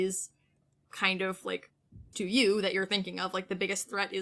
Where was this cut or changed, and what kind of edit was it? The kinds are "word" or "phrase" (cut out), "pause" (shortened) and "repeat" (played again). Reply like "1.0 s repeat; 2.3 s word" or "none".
2.1 s word